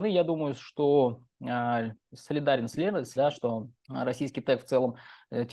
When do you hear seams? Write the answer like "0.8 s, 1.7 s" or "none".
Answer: 2.0 s, 3.2 s, 3.8 s

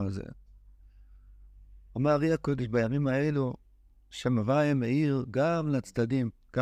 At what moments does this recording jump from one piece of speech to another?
none

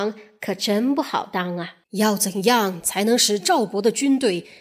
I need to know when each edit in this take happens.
1.8 s

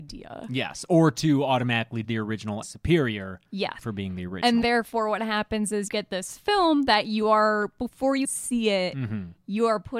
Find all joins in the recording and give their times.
2.0 s, 2.6 s, 3.8 s, 4.6 s, 5.9 s, 8.2 s

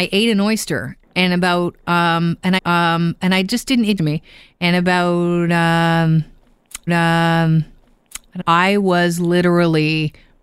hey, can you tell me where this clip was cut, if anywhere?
2.6 s, 4.0 s, 6.9 s, 8.4 s

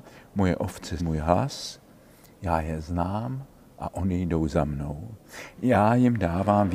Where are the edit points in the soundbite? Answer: 1.0 s

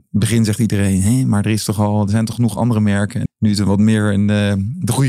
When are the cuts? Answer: 2.3 s, 3.3 s

